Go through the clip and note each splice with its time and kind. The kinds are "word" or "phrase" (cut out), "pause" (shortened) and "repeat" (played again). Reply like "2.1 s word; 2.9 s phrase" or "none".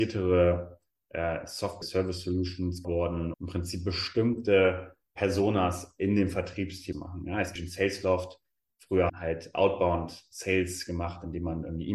1.8 s word; 2.8 s word; 3.3 s word; 5.1 s pause; 6.9 s phrase; 7.6 s phrase; 9.1 s phrase